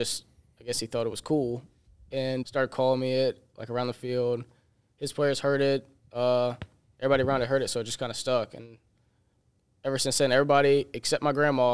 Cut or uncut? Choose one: cut